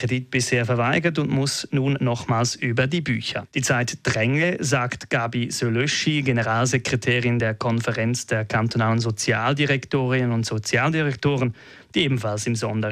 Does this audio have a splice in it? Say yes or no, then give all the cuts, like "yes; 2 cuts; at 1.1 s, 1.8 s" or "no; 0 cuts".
no; 0 cuts